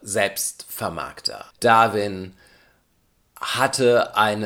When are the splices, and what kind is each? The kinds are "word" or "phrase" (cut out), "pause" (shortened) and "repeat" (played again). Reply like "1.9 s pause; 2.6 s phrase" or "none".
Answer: 1.5 s pause